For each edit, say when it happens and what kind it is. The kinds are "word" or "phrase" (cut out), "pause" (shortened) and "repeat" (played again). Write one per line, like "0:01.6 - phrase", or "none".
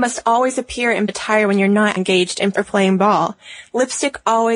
0:01.1 - word
0:02.0 - word
0:02.5 - word